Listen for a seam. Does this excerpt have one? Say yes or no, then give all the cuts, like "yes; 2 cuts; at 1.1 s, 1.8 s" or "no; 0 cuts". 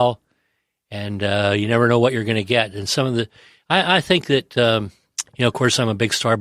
no; 0 cuts